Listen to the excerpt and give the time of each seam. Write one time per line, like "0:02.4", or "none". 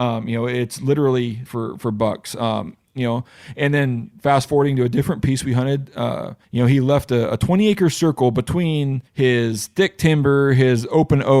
0:01.5
0:06.4
0:09.1